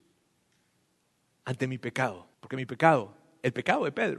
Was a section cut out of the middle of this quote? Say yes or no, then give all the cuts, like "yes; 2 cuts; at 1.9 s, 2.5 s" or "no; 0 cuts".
yes; 1 cut; at 2.3 s